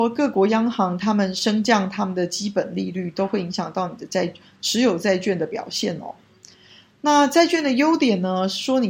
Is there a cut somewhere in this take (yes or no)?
no